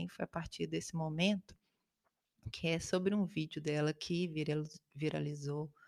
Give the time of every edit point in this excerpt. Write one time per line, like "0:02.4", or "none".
none